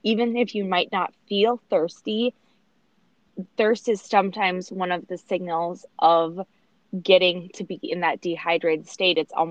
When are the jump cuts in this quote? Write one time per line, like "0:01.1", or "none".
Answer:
none